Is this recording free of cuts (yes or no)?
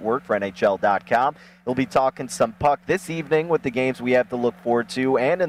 yes